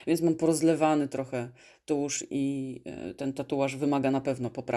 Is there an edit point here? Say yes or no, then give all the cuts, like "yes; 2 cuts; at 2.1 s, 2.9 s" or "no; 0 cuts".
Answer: no; 0 cuts